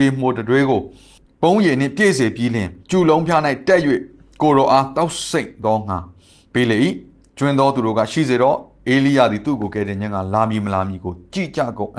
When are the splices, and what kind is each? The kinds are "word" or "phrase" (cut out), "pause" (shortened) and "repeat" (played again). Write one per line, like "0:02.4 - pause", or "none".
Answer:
0:02.8 - pause